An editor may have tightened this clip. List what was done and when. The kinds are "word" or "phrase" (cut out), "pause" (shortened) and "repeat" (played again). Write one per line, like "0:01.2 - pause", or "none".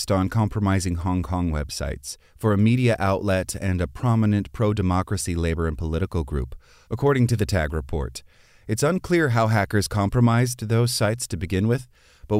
none

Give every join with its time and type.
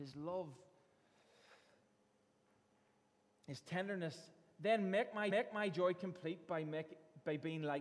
0:05.3 - repeat

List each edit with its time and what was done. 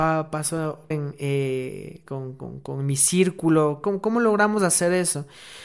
0:00.9 - word

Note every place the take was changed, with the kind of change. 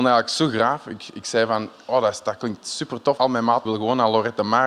0:03.2 - word
0:03.6 - word

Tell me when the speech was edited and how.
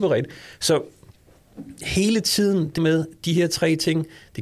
0:02.8 - word

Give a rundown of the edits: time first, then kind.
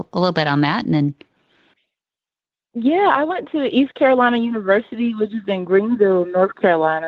none

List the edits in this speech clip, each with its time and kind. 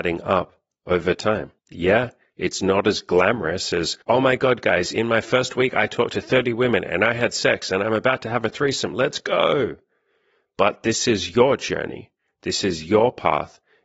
0:01.6 - pause
0:04.0 - pause

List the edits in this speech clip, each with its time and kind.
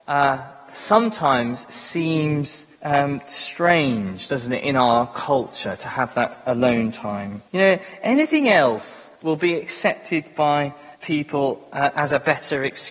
0:02.7 - pause
0:07.5 - pause
0:09.2 - pause
0:10.9 - pause

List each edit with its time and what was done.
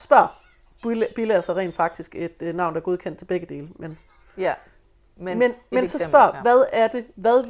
none

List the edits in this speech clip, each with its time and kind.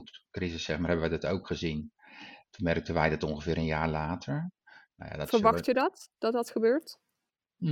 none

